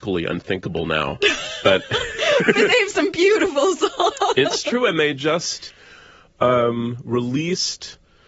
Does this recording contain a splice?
no; 0 cuts

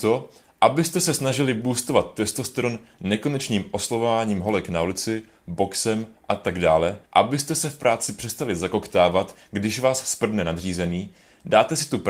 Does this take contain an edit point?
yes; 1 cut; at 7.1 s

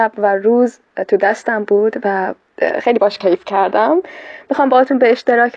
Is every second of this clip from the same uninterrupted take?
yes; 0 cuts

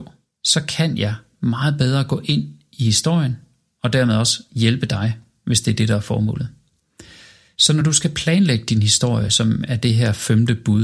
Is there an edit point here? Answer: no; 0 cuts

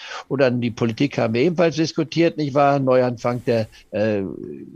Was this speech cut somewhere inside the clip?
no; 0 cuts

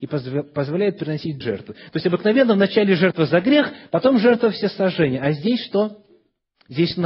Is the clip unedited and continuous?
no; 1 cut; at 1.4 s

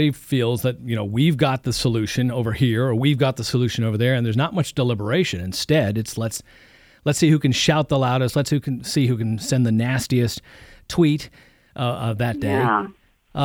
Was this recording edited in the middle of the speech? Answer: no; 0 cuts

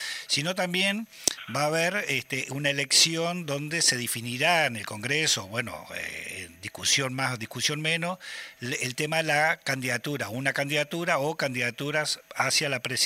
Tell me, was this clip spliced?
no; 0 cuts

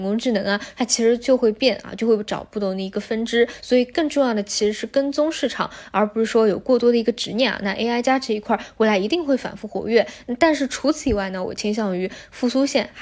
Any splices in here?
no; 0 cuts

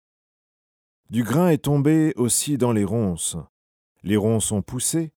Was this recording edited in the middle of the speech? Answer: no; 0 cuts

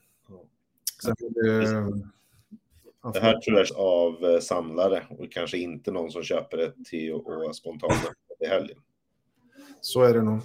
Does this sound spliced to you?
yes; 2 cuts; at 1.0 s, 3.7 s

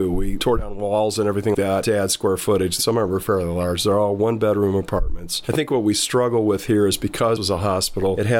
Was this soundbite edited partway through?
yes; 2 cuts; at 1.5 s, 7.4 s

